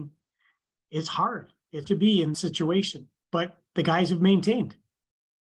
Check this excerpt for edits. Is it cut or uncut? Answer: cut